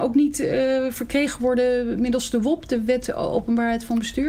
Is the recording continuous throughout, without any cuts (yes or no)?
yes